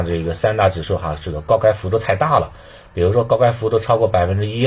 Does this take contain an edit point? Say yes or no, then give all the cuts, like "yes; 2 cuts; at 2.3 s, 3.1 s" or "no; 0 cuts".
no; 0 cuts